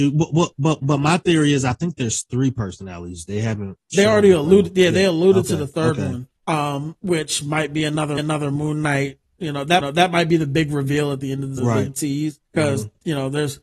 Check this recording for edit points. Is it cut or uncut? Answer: cut